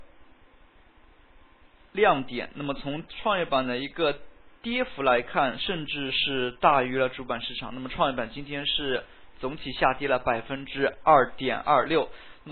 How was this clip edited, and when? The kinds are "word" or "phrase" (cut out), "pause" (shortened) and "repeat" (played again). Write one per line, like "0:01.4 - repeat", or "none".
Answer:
0:04.6 - pause